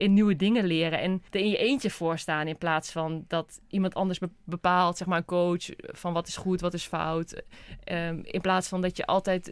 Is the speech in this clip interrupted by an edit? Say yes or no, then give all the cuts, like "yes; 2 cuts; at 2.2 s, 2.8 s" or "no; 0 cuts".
yes; 1 cut; at 1.3 s